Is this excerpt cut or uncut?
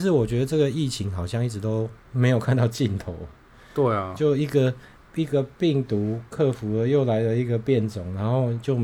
cut